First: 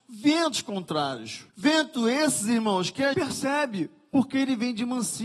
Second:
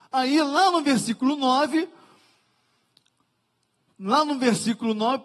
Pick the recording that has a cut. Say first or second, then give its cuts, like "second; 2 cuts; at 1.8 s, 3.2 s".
first; 2 cuts; at 1.5 s, 3.1 s